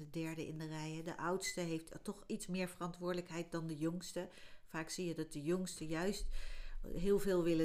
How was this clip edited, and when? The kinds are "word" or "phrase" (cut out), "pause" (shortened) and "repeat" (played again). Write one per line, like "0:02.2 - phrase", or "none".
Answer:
none

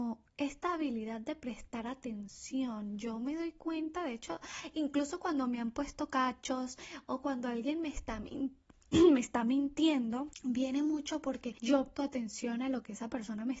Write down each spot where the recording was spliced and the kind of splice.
0:11.9 - word

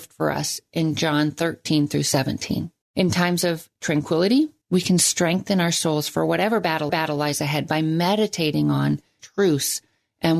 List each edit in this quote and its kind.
0:02.8 - pause
0:04.6 - pause
0:06.9 - repeat
0:09.2 - phrase

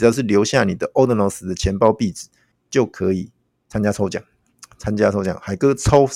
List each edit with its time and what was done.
0:02.5 - pause

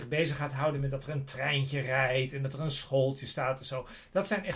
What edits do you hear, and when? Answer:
none

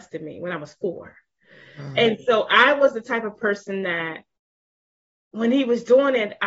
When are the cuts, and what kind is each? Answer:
none

